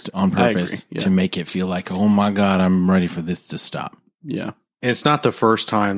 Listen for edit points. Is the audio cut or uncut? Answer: uncut